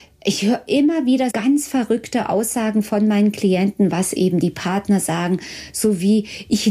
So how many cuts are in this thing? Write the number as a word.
one